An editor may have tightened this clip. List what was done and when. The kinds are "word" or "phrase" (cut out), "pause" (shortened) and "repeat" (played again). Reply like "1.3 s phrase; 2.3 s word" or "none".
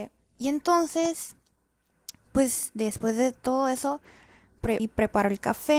4.8 s word